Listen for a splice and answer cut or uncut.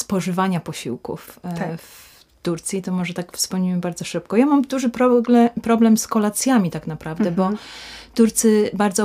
uncut